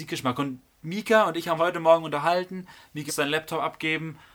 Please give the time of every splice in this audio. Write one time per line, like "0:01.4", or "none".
0:01.6
0:03.1